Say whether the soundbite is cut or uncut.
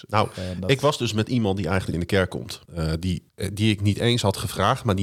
cut